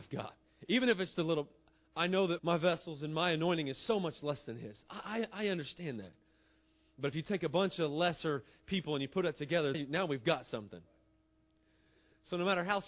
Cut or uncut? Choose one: cut